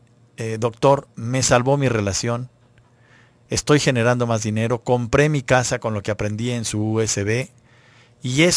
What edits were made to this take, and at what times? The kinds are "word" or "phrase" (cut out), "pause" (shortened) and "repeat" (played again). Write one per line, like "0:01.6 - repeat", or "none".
0:01.1 - pause